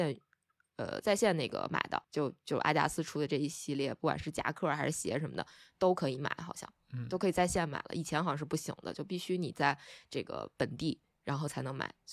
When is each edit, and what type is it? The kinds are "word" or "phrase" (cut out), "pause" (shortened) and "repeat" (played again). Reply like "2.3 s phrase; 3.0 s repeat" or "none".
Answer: 2.0 s pause